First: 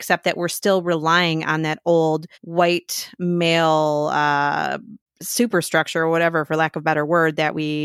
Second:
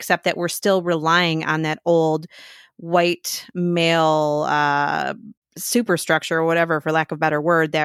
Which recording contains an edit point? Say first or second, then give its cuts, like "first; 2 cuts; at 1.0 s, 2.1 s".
first; 1 cut; at 2.3 s